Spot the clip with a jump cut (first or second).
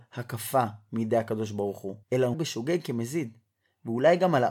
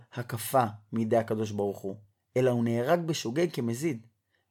first